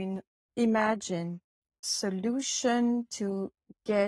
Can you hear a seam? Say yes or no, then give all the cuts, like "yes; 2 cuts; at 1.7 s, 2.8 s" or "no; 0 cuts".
yes; 1 cut; at 1.8 s